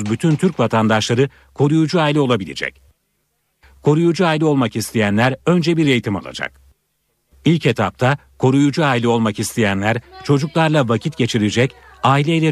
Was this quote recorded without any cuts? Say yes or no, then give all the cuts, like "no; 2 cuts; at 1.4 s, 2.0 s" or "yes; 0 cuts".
yes; 0 cuts